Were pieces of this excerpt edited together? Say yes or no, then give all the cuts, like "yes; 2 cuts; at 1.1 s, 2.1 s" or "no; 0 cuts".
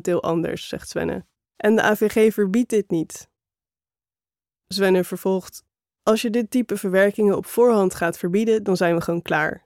yes; 1 cut; at 1.5 s